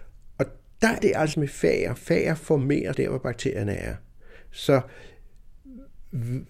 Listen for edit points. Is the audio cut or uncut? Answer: cut